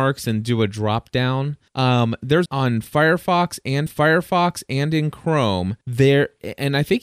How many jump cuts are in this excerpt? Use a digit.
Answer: 4